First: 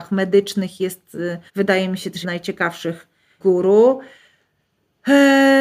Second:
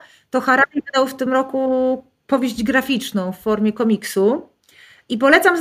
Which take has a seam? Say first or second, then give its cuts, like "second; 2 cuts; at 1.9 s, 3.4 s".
first; 3 cuts; at 1.5 s, 2.2 s, 3.4 s